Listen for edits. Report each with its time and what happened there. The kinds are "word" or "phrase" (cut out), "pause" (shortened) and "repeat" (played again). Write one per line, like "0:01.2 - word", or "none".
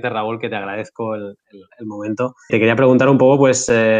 0:01.4 - word
0:02.5 - word